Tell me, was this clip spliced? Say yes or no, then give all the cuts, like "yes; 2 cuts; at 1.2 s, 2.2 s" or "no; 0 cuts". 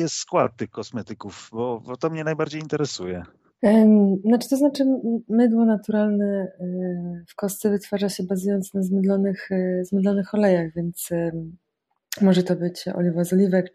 no; 0 cuts